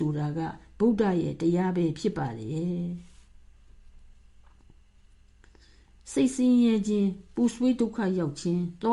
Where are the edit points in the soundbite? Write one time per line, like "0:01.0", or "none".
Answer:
none